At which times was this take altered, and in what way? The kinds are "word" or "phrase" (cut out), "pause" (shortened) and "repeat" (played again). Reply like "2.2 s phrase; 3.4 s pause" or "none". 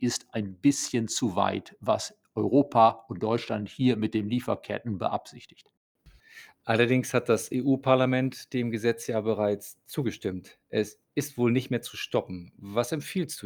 none